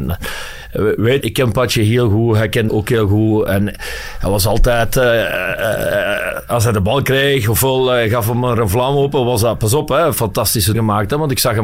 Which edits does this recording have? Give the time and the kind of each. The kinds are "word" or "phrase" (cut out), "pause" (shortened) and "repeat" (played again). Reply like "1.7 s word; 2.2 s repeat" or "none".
1.2 s word; 2.7 s word; 10.7 s word